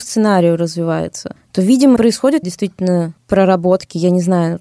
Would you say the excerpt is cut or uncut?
cut